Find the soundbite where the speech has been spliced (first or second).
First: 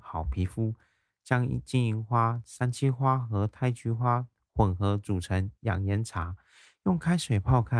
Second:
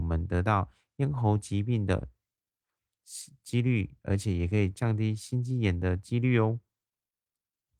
first